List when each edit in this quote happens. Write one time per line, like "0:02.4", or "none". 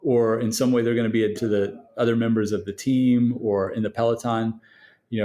0:01.3

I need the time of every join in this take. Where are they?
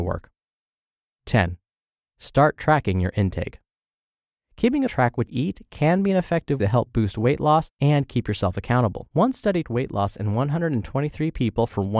0:04.9
0:05.3
0:06.6
0:07.7
0:09.1
0:09.6

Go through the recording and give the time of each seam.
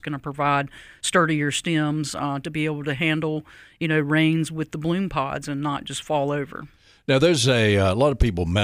none

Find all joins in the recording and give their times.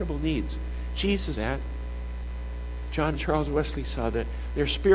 0:01.3
0:03.1

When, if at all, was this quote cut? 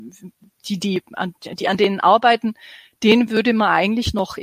none

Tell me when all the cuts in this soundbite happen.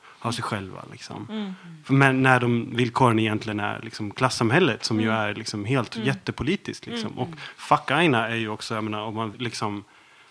0:09.3

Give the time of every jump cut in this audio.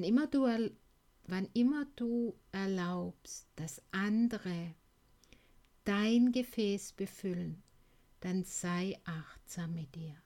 none

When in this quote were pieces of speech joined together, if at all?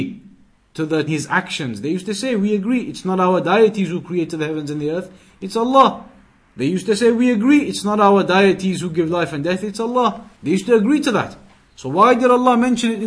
0:01.1
0:10.3

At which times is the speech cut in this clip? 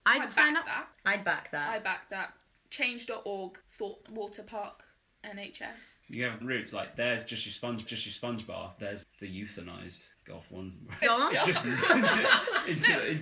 0:00.9
0:03.6
0:06.0
0:06.4
0:07.9
0:09.0
0:10.1
0:11.0
0:11.6

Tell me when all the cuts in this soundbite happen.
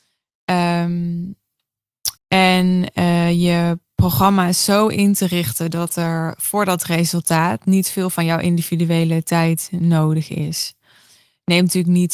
0:02.2

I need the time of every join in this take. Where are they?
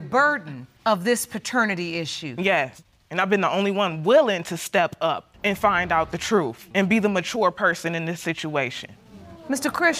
0:06.7

